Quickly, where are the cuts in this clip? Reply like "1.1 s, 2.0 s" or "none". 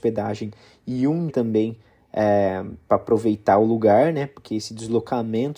1.3 s

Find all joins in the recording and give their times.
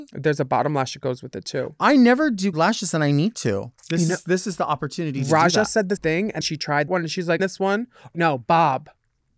2.5 s, 3.8 s, 6.0 s, 6.4 s, 6.9 s, 7.4 s, 8.1 s

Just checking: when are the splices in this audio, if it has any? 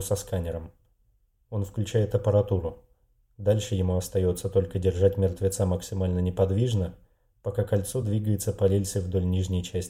none

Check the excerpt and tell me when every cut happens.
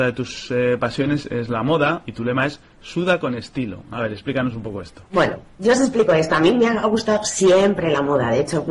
1.2 s, 2.1 s, 5.1 s

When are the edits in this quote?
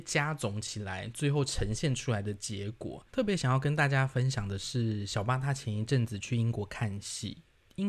3.1 s

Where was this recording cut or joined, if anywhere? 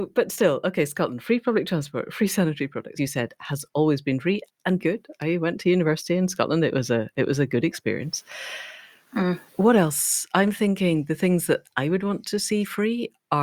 3.0 s, 4.5 s, 4.8 s, 9.5 s

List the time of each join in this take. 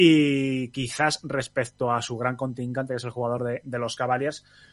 none

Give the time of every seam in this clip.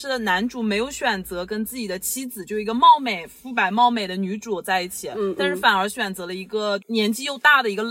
none

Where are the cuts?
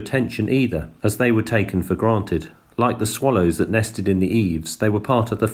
none

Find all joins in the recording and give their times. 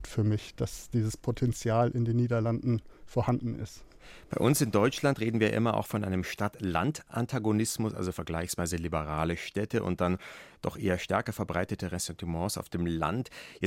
none

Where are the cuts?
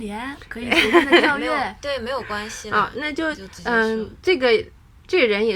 none

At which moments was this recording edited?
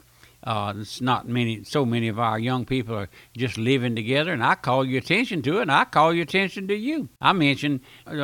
7.2 s

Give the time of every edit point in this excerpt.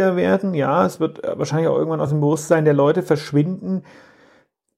none

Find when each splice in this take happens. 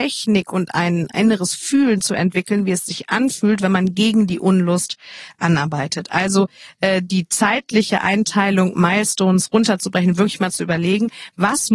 none

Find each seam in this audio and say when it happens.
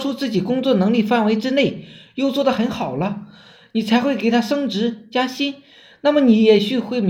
none

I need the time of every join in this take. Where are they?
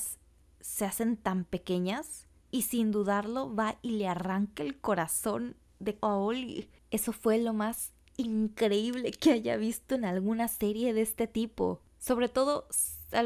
6.0 s

